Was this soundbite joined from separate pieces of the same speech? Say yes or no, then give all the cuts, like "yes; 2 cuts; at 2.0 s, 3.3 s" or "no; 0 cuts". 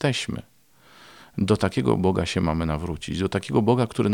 no; 0 cuts